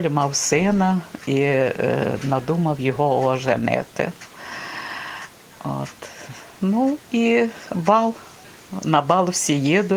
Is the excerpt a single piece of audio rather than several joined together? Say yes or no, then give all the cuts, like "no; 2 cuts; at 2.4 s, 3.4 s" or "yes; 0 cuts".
no; 1 cut; at 5.4 s